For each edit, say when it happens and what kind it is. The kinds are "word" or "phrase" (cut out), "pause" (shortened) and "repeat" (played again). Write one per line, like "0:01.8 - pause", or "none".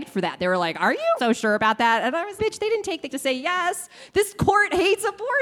0:01.2 - word
0:02.4 - word
0:03.1 - word